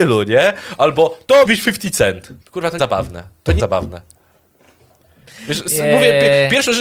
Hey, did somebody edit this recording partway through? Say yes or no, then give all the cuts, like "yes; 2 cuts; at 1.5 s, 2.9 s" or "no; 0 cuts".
yes; 4 cuts; at 1.4 s, 2.4 s, 2.8 s, 3.6 s